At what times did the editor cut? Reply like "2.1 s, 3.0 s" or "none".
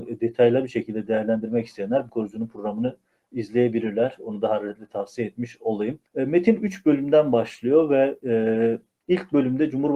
2.1 s, 6.1 s